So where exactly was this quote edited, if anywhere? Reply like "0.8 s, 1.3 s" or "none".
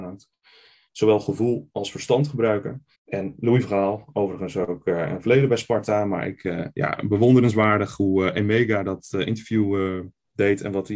2.9 s

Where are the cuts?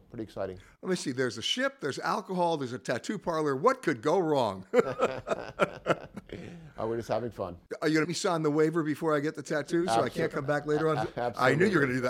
8.0 s

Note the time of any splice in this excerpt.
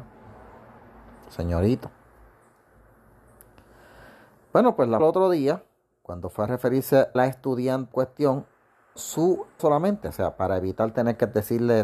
5.0 s, 7.1 s, 7.9 s, 9.0 s, 9.6 s

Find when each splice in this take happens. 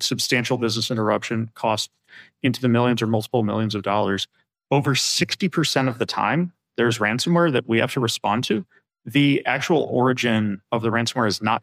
none

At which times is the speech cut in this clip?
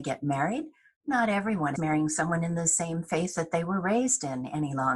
1.8 s

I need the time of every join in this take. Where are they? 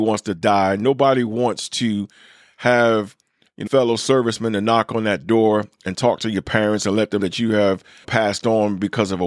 3.7 s, 7.2 s, 8.0 s

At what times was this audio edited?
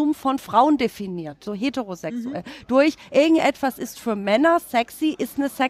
1.5 s

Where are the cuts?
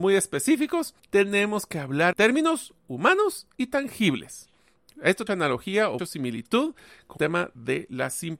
1.0 s, 2.1 s, 5.3 s, 6.0 s, 7.2 s

